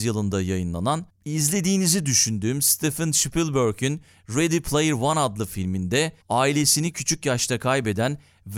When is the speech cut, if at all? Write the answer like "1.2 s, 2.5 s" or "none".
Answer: 1.1 s, 6.2 s